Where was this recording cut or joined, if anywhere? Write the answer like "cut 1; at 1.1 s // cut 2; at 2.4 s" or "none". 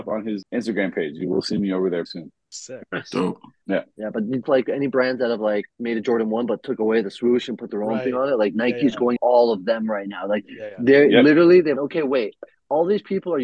cut 1; at 2.1 s // cut 2; at 4.4 s // cut 3; at 9.2 s // cut 4; at 11.8 s